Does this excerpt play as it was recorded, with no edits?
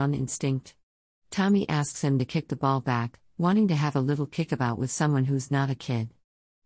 yes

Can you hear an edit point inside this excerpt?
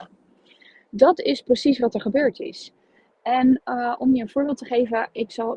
no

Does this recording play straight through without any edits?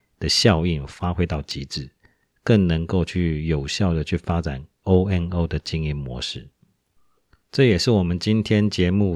yes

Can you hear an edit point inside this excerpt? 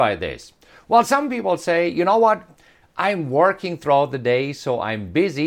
no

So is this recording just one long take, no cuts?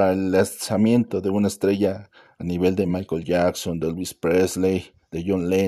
yes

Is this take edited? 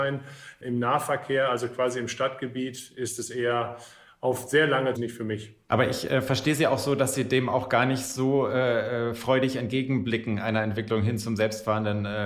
yes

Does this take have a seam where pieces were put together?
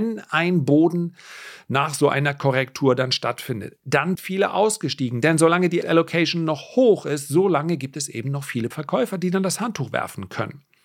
yes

